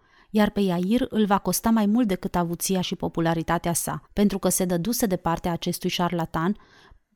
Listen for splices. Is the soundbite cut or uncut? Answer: cut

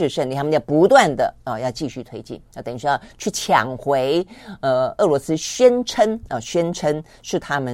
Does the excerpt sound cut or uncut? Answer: cut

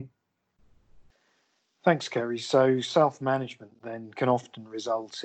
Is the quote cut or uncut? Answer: uncut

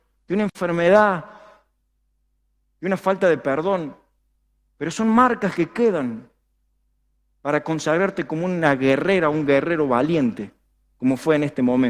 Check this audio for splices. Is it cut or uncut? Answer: uncut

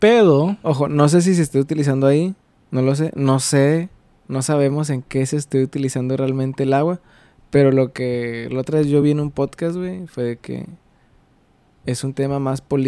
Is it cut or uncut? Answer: uncut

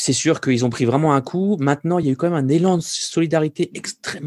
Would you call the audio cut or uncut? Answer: uncut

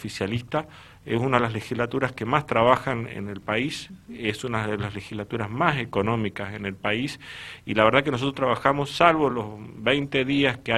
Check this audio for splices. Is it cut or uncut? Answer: uncut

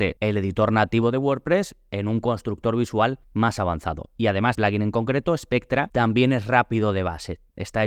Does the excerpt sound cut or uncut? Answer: cut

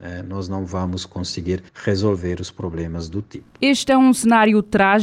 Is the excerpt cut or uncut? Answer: cut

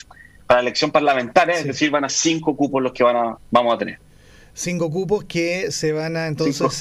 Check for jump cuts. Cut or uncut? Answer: cut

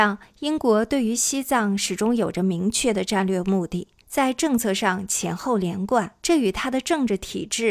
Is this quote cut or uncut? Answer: cut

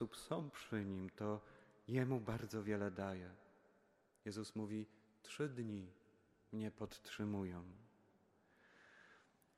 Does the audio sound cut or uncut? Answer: uncut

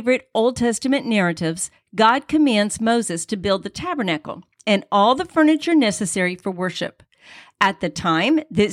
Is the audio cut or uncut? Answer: uncut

